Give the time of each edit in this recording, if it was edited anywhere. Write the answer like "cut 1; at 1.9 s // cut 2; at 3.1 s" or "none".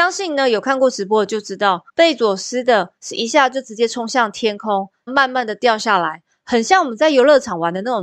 cut 1; at 1.9 s // cut 2; at 5.1 s